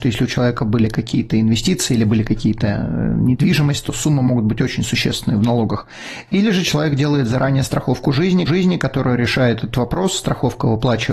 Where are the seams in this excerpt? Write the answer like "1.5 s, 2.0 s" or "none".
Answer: 8.5 s